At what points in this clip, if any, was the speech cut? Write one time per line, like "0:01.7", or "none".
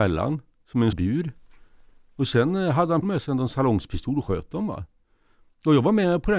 0:00.9
0:03.0